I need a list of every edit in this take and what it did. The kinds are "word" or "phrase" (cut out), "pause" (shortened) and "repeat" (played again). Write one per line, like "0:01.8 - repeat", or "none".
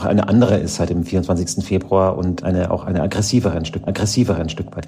0:02.4 - word
0:03.9 - repeat